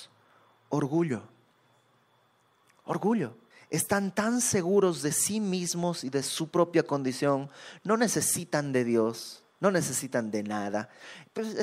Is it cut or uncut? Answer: cut